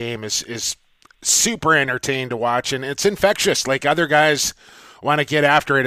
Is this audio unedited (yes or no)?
yes